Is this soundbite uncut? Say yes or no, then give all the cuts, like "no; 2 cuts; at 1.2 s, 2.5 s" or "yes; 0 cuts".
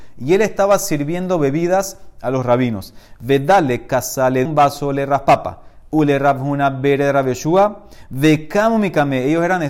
no; 1 cut; at 4.5 s